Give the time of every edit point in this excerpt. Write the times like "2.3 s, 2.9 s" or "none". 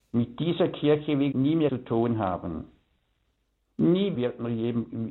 1.3 s, 1.7 s, 4.1 s